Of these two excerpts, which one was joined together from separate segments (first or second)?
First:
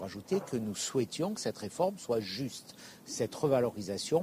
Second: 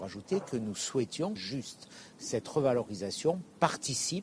second